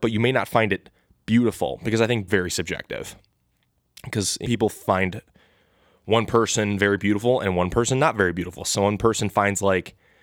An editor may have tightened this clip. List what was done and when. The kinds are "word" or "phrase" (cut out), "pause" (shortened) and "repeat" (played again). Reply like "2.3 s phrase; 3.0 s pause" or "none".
2.3 s phrase; 4.4 s phrase